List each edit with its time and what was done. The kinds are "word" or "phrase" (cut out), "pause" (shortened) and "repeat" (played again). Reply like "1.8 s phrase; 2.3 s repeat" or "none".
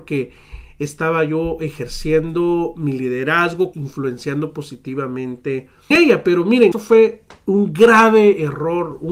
3.7 s phrase; 5.9 s word; 6.7 s word